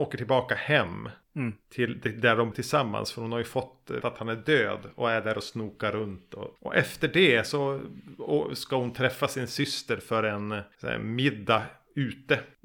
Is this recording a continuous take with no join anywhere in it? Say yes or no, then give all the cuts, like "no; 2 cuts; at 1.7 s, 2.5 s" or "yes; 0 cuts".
no; 5 cuts; at 1.2 s, 2.5 s, 4.0 s, 6.6 s, 10.7 s